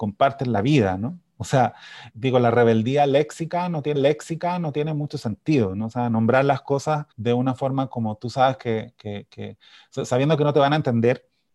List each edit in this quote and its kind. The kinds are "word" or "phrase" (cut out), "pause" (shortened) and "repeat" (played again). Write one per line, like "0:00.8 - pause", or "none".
0:02.1 - word
0:04.0 - repeat
0:07.1 - pause